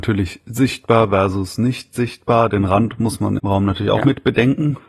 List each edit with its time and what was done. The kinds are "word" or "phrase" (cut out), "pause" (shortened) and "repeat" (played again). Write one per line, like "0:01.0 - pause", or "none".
0:03.4 - word